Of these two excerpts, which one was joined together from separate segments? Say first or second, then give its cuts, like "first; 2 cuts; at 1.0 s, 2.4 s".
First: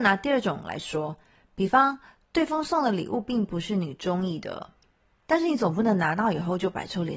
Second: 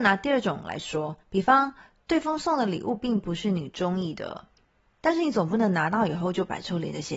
second; 1 cut; at 1.2 s